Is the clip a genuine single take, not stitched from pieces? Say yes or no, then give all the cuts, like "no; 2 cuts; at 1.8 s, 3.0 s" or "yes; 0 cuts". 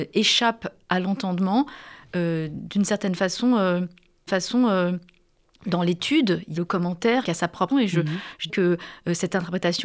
no; 5 cuts; at 4.3 s, 6.6 s, 7.2 s, 7.7 s, 8.5 s